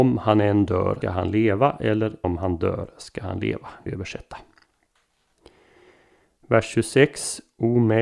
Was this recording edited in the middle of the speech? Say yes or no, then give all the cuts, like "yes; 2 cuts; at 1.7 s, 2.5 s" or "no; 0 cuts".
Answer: yes; 3 cuts; at 1.0 s, 2.2 s, 3.9 s